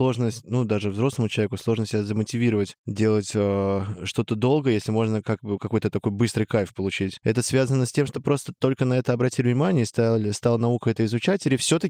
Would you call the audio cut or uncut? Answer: uncut